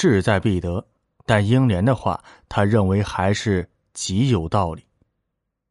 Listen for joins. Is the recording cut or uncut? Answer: uncut